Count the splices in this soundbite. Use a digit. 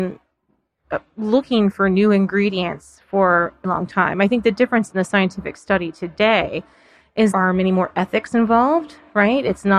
2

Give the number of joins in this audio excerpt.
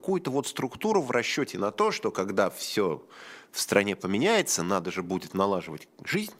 0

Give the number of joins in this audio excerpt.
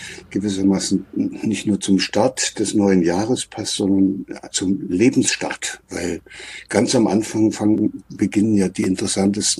1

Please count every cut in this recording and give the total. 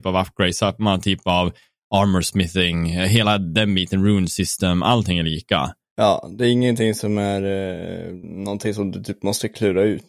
0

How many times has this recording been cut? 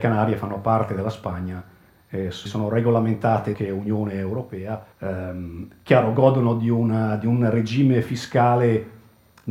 3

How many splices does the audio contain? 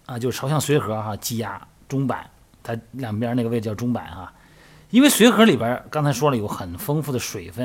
0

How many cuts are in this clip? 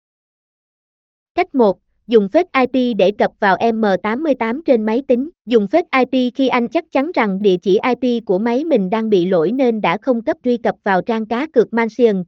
5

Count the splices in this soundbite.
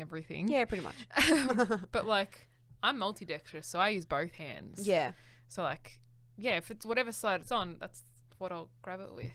0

